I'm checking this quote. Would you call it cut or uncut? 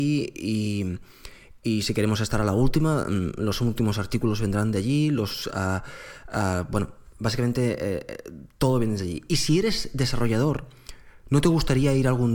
uncut